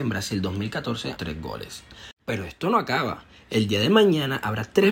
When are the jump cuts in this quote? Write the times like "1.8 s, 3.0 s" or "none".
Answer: 1.1 s, 2.2 s